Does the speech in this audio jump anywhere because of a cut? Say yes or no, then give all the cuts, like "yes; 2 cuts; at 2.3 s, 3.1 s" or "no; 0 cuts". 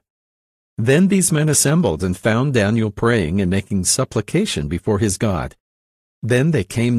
no; 0 cuts